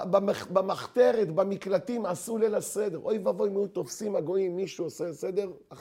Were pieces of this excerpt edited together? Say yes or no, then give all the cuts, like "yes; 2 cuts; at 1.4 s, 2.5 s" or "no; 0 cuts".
no; 0 cuts